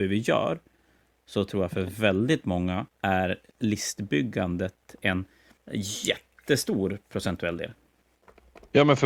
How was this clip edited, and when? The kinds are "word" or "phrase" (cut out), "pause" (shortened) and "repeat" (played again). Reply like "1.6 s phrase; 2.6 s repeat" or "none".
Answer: 2.9 s pause; 5.6 s pause